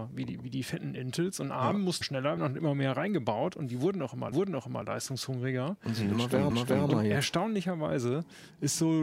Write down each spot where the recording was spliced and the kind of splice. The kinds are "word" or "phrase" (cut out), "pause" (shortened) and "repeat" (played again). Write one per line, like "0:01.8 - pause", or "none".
0:02.0 - word
0:02.4 - word
0:04.3 - repeat
0:06.5 - repeat